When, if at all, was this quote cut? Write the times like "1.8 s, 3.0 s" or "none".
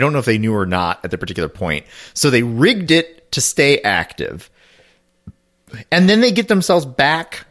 none